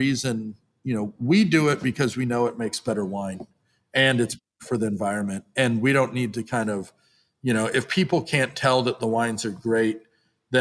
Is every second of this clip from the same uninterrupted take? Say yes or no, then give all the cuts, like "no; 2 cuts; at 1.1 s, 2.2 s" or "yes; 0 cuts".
yes; 0 cuts